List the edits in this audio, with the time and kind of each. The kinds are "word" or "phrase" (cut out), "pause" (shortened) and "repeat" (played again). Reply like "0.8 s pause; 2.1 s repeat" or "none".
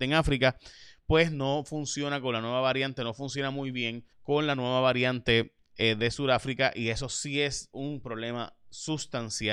4.1 s pause